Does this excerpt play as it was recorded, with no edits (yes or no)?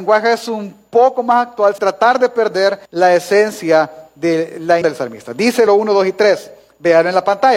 no